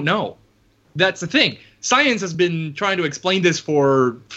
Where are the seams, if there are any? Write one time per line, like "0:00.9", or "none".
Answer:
none